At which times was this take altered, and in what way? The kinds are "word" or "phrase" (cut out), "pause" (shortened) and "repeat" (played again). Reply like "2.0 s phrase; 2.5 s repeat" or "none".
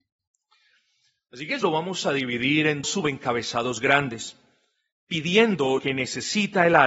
1.6 s word; 2.8 s word; 5.8 s word